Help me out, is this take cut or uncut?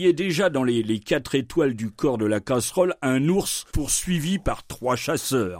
cut